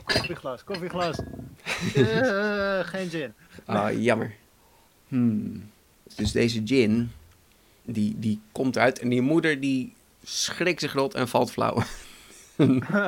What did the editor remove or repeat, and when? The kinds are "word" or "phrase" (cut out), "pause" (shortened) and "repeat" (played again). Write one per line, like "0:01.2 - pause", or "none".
none